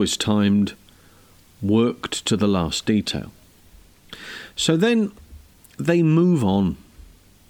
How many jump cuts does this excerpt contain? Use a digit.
0